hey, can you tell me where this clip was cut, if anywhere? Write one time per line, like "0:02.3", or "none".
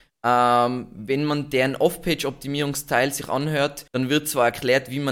0:03.9